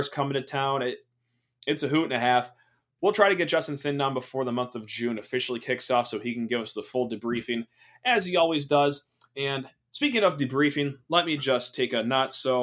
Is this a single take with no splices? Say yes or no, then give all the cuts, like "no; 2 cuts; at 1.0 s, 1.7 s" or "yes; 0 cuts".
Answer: yes; 0 cuts